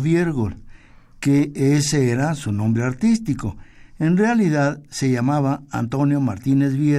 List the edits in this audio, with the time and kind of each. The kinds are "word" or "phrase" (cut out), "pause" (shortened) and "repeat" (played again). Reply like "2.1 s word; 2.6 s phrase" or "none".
none